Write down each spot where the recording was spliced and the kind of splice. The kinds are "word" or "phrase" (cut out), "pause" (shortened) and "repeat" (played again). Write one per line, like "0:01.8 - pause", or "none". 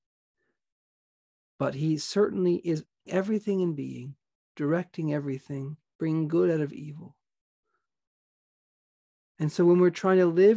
0:03.1 - word